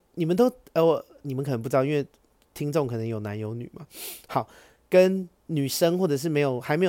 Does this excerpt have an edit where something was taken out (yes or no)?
no